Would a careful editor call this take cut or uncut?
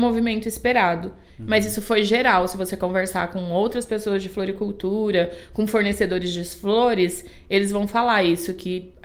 uncut